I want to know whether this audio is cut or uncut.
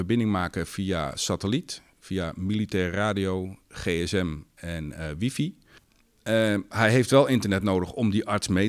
uncut